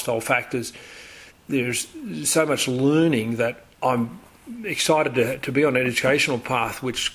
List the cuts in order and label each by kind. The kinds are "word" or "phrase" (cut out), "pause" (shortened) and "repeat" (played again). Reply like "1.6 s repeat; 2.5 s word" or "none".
1.3 s pause; 3.7 s pause

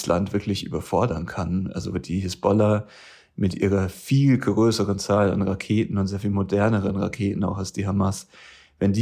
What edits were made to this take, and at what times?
none

